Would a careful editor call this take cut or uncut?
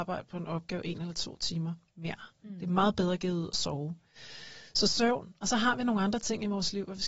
uncut